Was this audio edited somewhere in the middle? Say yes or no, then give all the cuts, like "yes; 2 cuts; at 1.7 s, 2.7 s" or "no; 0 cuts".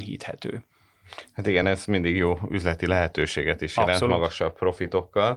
no; 0 cuts